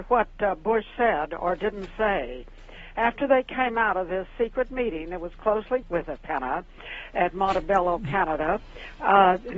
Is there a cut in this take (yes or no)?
yes